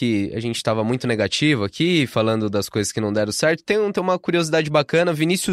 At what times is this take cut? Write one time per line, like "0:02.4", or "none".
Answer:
none